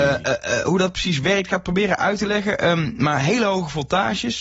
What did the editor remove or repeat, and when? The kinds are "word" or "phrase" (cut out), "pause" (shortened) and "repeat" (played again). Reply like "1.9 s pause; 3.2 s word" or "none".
none